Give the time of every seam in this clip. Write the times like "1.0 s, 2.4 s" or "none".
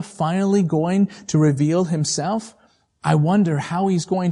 none